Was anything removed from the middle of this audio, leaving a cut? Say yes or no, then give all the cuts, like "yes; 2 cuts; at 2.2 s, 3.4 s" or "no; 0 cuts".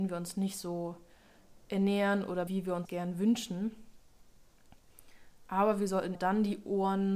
yes; 3 cuts; at 2.5 s, 2.8 s, 6.1 s